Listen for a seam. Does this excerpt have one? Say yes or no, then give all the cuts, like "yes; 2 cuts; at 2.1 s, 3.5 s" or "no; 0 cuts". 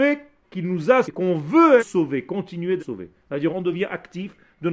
yes; 4 cuts; at 1.0 s, 1.8 s, 2.8 s, 3.5 s